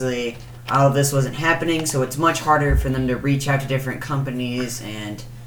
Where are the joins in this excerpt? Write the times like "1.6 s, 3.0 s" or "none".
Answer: none